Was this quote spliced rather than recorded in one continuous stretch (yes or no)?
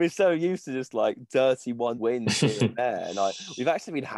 yes